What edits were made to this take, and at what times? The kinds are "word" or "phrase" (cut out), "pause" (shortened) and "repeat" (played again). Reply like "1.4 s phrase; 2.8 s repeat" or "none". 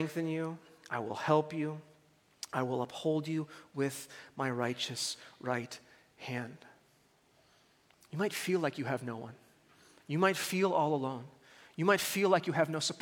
none